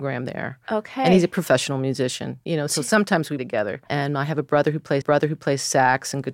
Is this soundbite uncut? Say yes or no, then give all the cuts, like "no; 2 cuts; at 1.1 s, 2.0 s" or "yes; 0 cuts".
no; 3 cuts; at 3.4 s, 3.9 s, 5.0 s